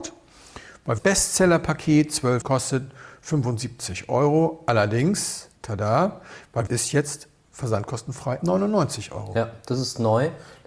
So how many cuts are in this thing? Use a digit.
5